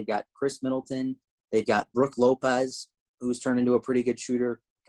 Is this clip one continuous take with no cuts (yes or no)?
yes